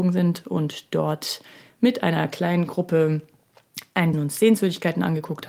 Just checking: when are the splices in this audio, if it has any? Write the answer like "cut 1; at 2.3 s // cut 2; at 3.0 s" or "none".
cut 1; at 4.1 s